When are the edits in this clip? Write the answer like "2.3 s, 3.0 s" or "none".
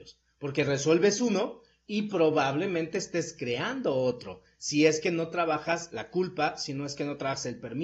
none